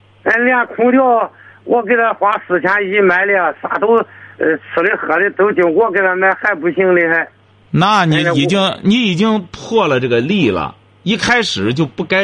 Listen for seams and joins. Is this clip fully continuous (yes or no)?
yes